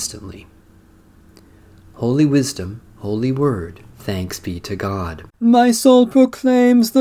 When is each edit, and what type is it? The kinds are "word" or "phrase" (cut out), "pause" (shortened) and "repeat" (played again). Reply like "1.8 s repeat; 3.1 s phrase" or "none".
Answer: 2.9 s pause; 3.9 s pause; 5.3 s pause